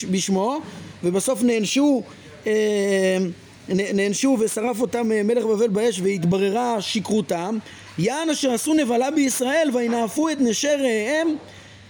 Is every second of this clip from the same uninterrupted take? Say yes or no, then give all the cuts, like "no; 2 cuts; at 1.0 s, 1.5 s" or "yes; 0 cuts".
yes; 0 cuts